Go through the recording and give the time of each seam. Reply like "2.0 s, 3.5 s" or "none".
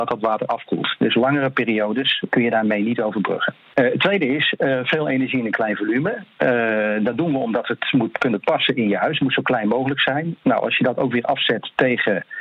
none